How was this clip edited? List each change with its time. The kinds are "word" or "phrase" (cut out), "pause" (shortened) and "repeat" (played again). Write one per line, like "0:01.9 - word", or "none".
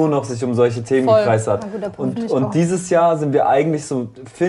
none